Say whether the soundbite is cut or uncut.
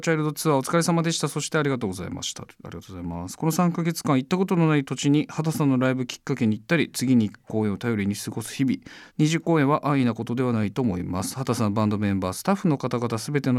cut